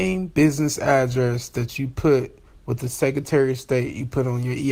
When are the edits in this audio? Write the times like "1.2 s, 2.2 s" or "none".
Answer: none